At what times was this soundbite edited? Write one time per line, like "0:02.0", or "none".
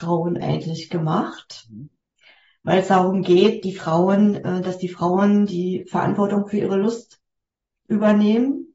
none